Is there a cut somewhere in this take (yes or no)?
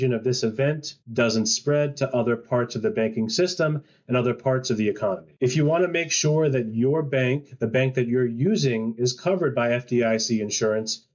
yes